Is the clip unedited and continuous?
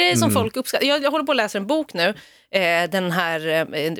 yes; 0 cuts

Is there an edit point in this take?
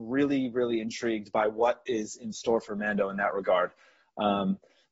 no; 0 cuts

